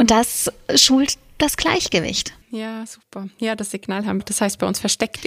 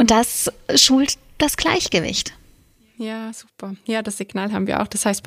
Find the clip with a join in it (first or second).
first